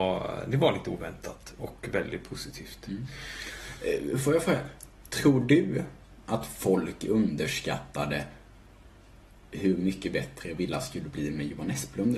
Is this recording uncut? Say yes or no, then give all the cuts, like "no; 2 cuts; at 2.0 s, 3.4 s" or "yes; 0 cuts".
yes; 0 cuts